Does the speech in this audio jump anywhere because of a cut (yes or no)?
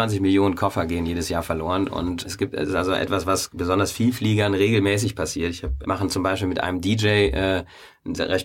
yes